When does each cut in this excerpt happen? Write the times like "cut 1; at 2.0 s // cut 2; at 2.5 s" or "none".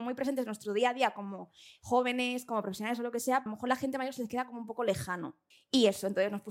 cut 1; at 3.5 s // cut 2; at 5.5 s